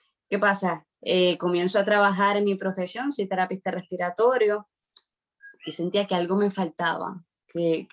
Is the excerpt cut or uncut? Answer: cut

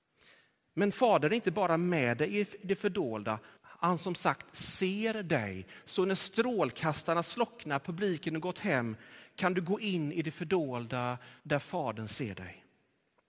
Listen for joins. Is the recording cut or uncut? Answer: cut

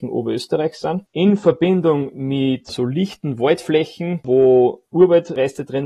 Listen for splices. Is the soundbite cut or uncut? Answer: uncut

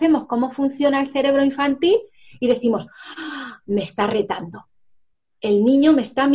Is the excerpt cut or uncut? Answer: uncut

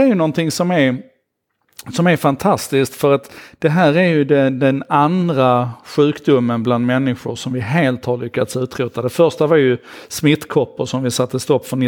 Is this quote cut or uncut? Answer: uncut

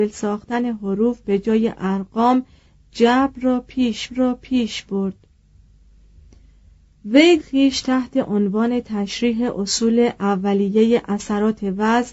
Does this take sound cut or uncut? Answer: cut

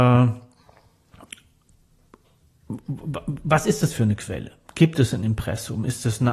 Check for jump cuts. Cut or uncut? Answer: uncut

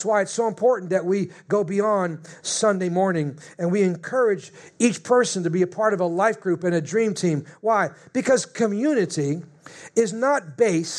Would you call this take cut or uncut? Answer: uncut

